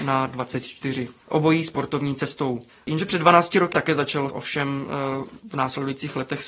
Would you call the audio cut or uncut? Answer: cut